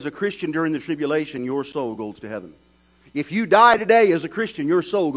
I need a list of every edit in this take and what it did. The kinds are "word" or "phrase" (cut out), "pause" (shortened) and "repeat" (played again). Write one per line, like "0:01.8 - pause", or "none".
none